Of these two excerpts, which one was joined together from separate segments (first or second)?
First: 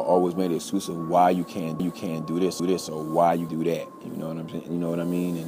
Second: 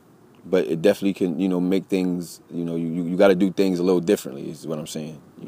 first